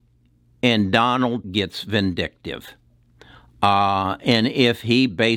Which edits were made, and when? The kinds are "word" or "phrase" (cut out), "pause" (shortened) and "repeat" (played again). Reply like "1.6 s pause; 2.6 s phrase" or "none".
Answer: 1.4 s word